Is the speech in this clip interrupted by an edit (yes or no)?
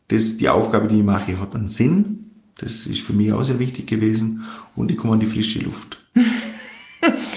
no